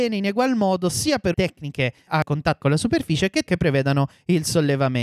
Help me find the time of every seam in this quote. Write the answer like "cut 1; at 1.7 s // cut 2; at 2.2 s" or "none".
cut 1; at 1.3 s // cut 2; at 2.1 s // cut 3; at 2.6 s // cut 4; at 3.5 s

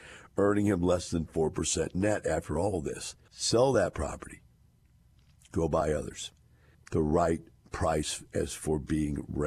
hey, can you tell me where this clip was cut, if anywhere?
cut 1; at 3.3 s // cut 2; at 6.7 s

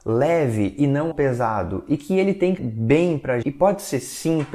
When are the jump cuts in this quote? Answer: cut 1; at 1.1 s // cut 2; at 2.6 s // cut 3; at 3.4 s

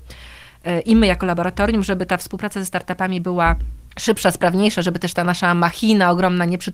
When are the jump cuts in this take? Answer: cut 1; at 3.9 s

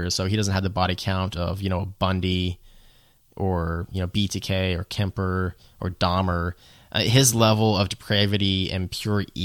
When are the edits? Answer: none

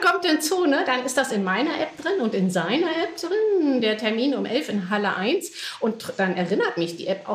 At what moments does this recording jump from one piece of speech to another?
none

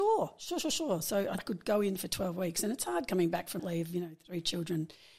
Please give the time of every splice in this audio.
cut 1; at 1.4 s // cut 2; at 3.6 s

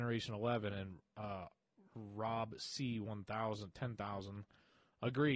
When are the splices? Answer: none

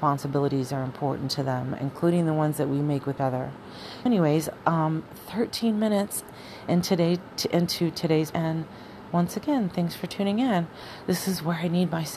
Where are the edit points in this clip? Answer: cut 1; at 3.2 s // cut 2; at 4.1 s // cut 3; at 8.3 s

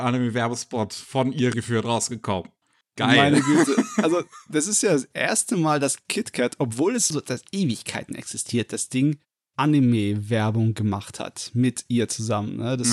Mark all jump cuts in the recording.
cut 1; at 1.5 s // cut 2; at 7.1 s

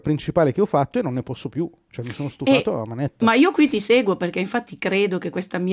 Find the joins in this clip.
none

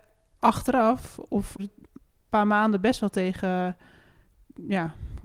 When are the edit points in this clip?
cut 1; at 1.6 s

